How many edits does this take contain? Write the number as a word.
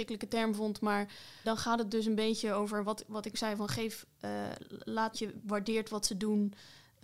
three